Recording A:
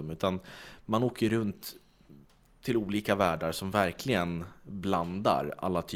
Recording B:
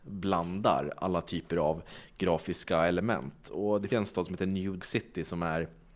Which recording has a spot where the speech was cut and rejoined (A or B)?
B